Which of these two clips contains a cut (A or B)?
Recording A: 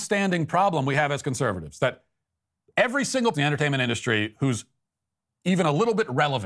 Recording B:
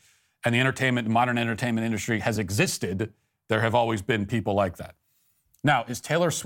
A